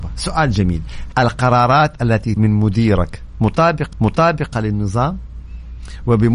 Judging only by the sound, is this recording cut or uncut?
cut